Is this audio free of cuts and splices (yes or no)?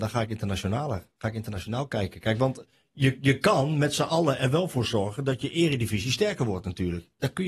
yes